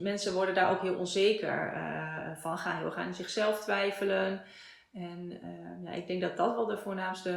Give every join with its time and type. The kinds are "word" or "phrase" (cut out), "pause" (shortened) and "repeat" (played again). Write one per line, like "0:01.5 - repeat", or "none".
none